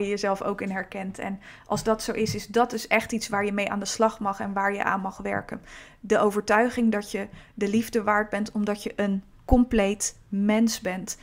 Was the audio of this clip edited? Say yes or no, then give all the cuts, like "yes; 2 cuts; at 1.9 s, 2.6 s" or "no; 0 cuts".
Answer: no; 0 cuts